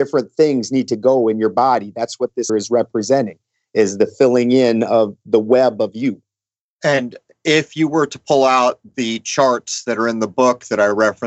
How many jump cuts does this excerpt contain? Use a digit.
1